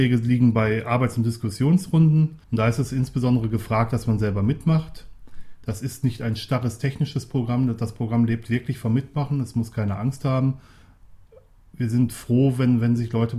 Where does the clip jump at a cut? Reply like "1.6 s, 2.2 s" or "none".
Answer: 2.4 s